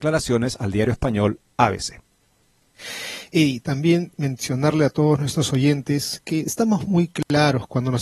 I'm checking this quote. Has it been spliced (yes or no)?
no